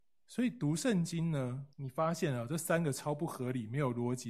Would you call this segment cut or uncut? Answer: cut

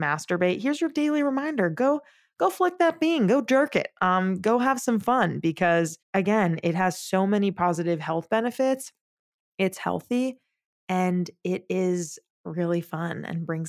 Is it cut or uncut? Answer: cut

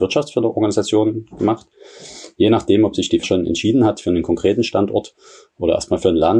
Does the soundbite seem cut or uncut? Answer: cut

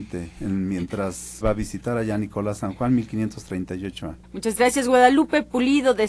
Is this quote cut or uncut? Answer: cut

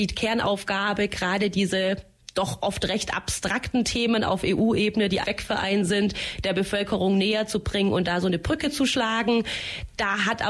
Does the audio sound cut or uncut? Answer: cut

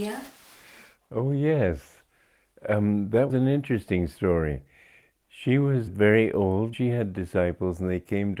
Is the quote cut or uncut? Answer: cut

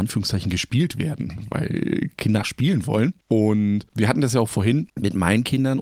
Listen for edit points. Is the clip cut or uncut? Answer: cut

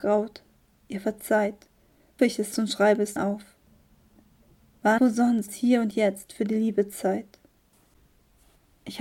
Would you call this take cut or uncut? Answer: cut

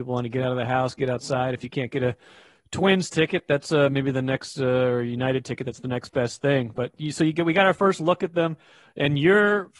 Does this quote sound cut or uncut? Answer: uncut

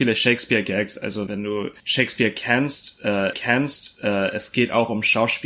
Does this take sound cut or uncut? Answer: cut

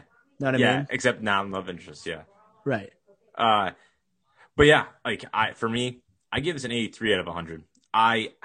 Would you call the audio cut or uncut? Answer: uncut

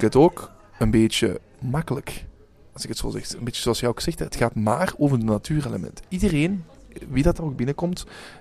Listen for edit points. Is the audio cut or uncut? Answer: uncut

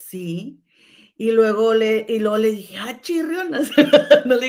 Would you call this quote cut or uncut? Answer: uncut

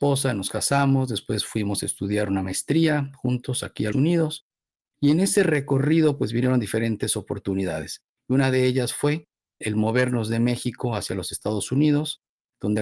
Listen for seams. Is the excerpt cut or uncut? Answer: cut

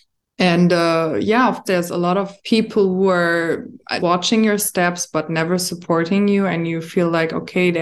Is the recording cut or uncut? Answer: cut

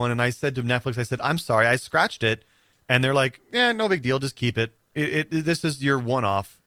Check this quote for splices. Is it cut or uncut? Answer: uncut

